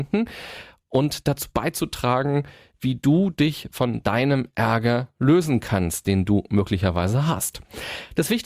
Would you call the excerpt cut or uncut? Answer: uncut